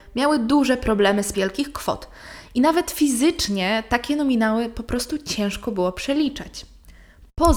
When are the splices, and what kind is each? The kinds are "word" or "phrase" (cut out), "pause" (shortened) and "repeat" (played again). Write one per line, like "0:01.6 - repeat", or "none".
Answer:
0:01.3 - phrase